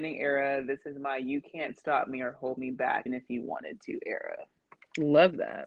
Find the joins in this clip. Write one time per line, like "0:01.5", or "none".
0:03.1